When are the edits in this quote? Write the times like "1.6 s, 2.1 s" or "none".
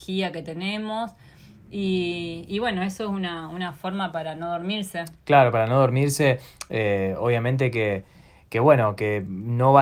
none